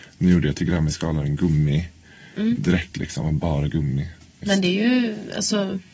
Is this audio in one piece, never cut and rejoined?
yes; 0 cuts

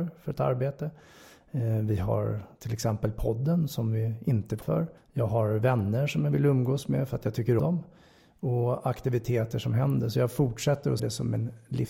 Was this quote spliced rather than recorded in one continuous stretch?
yes; 4 cuts; at 4.6 s, 5.0 s, 7.6 s, 11.0 s

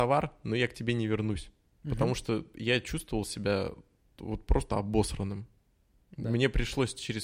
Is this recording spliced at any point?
no; 0 cuts

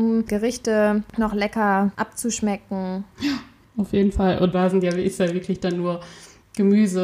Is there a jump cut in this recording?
no; 0 cuts

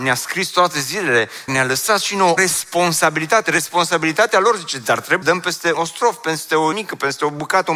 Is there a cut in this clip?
yes; 5 cuts; at 1.5 s, 2.4 s, 5.2 s, 5.7 s, 6.7 s

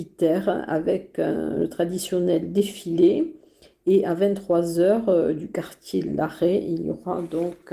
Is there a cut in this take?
no; 0 cuts

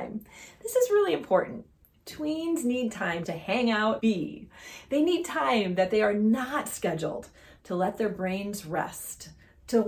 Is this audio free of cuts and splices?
no; 2 cuts; at 3.2 s, 4.0 s

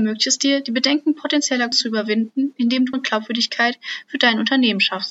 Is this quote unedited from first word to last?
no; 2 cuts; at 1.7 s, 2.9 s

